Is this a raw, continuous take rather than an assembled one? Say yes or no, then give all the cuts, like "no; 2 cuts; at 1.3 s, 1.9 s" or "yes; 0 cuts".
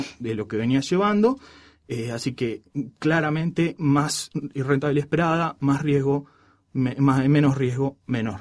yes; 0 cuts